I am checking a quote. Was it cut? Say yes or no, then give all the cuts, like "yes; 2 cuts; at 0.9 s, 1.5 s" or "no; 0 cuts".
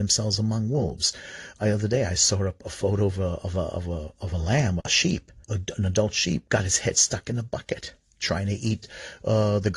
yes; 3 cuts; at 1.6 s, 4.8 s, 5.4 s